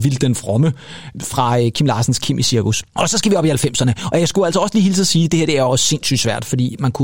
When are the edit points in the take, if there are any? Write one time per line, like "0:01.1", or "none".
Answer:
0:02.9